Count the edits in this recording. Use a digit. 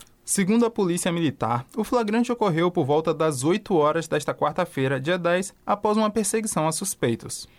0